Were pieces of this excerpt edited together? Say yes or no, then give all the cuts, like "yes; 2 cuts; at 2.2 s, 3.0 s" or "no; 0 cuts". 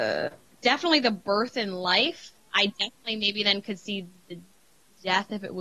no; 0 cuts